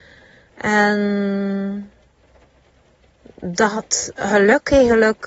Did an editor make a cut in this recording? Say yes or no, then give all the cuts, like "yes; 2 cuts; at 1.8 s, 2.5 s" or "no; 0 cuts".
no; 0 cuts